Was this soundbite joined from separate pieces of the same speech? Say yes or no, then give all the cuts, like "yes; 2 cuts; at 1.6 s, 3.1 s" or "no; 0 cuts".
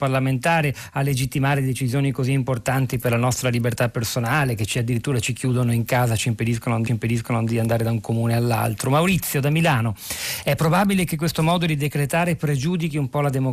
yes; 1 cut; at 6.9 s